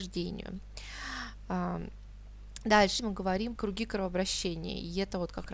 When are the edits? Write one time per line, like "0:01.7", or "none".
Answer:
0:03.0
0:03.6